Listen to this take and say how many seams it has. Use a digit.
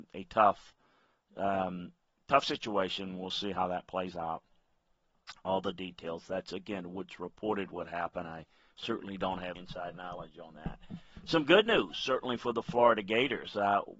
1